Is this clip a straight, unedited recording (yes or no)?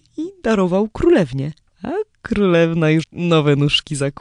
no